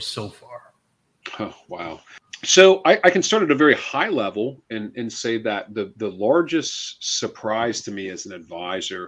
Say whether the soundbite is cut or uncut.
uncut